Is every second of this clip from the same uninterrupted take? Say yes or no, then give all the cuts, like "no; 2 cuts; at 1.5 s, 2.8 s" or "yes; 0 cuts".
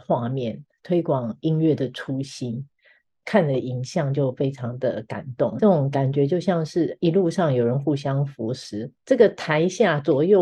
no; 1 cut; at 5.6 s